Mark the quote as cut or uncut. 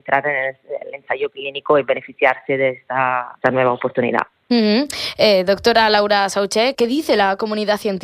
cut